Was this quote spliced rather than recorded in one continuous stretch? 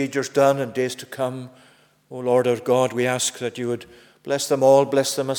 no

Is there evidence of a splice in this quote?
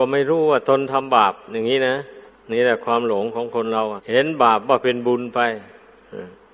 yes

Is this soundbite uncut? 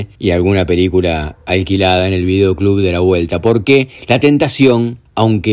yes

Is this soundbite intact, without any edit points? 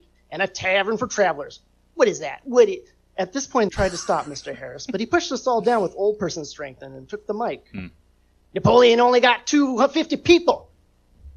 no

